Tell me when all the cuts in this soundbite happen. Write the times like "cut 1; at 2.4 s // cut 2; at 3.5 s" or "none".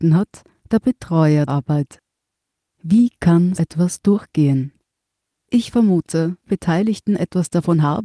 cut 1; at 1.5 s // cut 2; at 3.6 s // cut 3; at 6.4 s